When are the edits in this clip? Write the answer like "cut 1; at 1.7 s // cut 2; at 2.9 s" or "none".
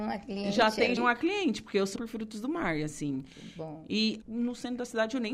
cut 1; at 1.0 s // cut 2; at 2.0 s // cut 3; at 4.2 s